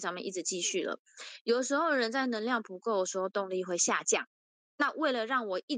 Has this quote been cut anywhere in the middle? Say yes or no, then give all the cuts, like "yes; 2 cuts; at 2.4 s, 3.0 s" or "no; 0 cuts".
no; 0 cuts